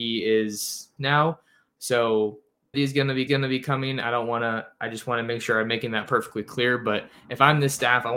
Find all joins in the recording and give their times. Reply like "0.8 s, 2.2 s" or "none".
1.0 s, 2.7 s, 3.3 s

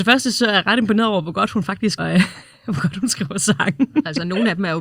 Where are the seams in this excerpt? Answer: 2.0 s

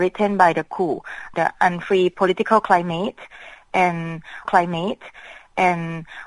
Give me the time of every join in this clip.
1.3 s, 4.4 s

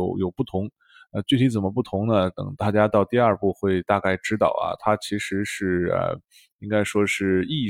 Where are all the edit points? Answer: none

